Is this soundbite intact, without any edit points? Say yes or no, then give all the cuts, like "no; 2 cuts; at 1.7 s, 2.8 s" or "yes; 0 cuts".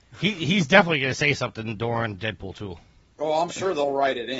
yes; 0 cuts